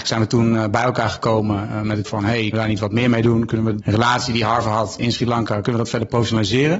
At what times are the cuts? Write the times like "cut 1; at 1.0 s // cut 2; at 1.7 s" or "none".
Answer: cut 1; at 2.1 s // cut 2; at 2.5 s // cut 3; at 3.8 s // cut 4; at 5.0 s